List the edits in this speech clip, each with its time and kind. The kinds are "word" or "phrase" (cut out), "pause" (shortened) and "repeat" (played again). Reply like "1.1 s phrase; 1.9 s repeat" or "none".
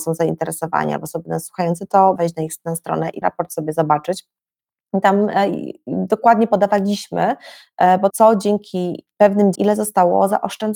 2.2 s word; 3.2 s word; 8.1 s word; 9.5 s word